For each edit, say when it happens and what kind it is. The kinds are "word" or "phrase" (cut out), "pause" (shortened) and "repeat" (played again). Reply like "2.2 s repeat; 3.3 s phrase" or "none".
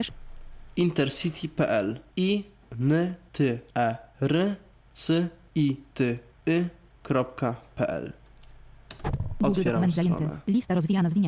none